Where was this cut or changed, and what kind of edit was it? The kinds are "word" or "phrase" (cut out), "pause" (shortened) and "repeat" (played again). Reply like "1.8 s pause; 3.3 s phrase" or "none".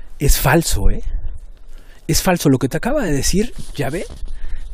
none